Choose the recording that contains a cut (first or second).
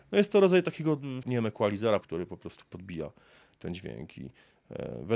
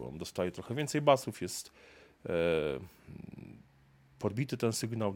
first